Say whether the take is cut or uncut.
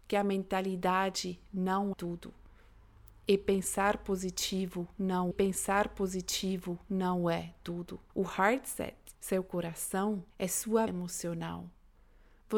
cut